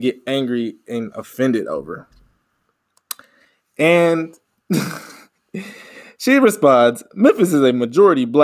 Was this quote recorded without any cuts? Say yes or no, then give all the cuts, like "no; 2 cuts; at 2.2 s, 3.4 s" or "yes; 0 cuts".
yes; 0 cuts